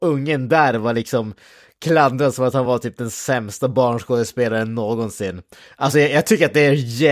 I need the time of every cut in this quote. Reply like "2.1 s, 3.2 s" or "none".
none